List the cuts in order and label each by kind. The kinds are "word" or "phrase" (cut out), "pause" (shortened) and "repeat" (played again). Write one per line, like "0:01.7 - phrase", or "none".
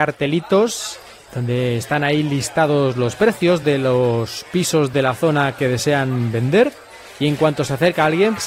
none